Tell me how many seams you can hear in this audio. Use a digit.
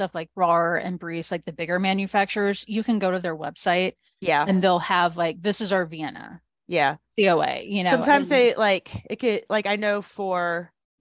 0